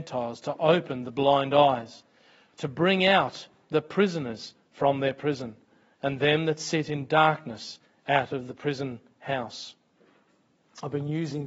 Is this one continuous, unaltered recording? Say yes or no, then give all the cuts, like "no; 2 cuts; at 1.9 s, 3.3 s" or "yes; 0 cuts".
yes; 0 cuts